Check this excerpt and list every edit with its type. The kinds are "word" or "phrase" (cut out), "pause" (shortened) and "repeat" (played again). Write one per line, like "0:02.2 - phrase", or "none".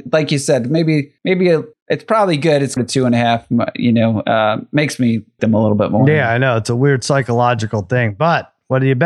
0:01.2 - pause
0:01.7 - pause
0:02.8 - phrase
0:05.4 - word